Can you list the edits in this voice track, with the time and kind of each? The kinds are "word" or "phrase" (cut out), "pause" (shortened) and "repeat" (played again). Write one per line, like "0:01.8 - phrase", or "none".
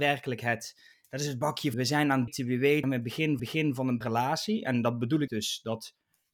0:00.9 - pause
0:01.7 - word
0:02.3 - word
0:02.8 - word
0:03.4 - repeat
0:04.0 - word
0:05.3 - word